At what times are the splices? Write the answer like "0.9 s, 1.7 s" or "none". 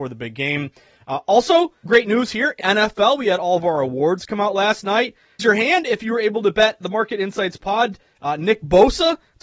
1.9 s, 2.6 s, 5.4 s, 6.8 s